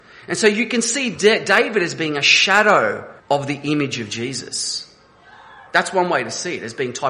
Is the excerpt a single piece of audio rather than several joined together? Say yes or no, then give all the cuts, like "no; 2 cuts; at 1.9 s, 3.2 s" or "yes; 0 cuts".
no; 2 cuts; at 3.2 s, 5.7 s